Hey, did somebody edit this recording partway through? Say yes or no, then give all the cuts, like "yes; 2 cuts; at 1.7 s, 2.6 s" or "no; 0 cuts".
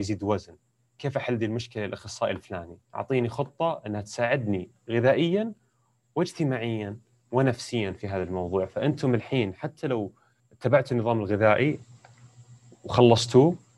yes; 2 cuts; at 2.8 s, 10.4 s